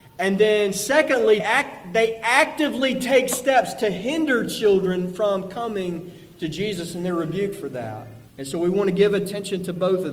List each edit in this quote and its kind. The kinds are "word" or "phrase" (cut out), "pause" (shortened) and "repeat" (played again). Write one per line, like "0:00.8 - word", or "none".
0:01.4 - word
0:08.3 - pause